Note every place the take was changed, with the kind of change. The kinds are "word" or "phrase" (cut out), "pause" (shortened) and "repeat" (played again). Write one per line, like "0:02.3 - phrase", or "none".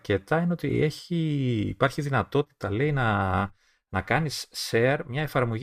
none